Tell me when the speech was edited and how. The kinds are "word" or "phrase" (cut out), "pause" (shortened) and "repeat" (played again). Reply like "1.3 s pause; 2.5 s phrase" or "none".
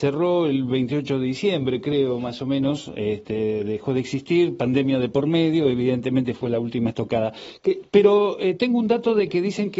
none